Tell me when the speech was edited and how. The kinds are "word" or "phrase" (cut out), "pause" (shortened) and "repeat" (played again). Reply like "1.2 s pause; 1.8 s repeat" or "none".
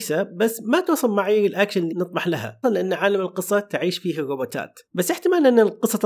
1.9 s word; 2.6 s word; 4.9 s pause